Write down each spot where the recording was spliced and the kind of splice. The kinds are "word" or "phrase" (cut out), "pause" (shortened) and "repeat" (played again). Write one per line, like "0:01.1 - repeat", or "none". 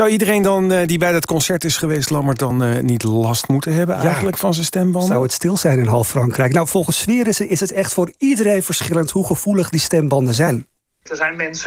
none

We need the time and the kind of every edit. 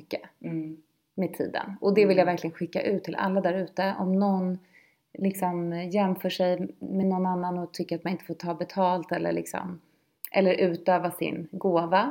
none

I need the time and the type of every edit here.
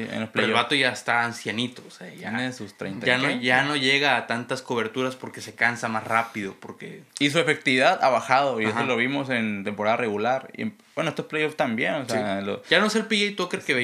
0:07.1 - pause

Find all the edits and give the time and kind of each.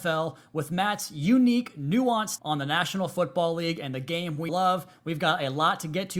0:02.4 - word
0:04.5 - word

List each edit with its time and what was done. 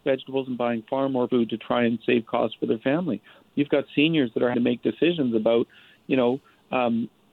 0:01.3 - word
0:04.5 - word

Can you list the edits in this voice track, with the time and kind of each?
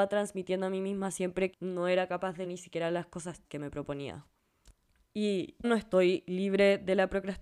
0:01.5 - word
0:02.4 - word
0:03.4 - word
0:05.6 - word

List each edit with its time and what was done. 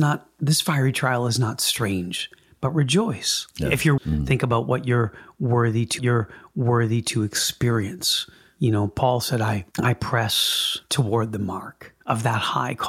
0:04.0 - phrase
0:06.0 - repeat
0:09.7 - pause
0:10.8 - pause

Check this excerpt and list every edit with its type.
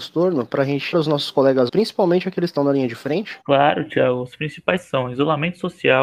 0:00.9 - word
0:01.7 - word
0:02.6 - word
0:03.4 - pause
0:04.8 - word

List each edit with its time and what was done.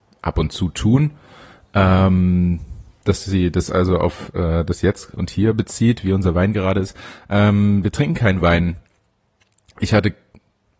none

